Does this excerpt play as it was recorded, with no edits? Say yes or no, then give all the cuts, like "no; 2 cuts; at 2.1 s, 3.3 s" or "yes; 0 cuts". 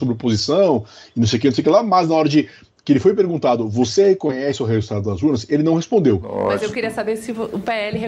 yes; 0 cuts